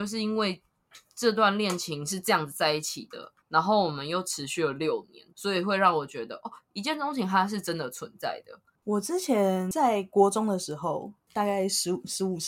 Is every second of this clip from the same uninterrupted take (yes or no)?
no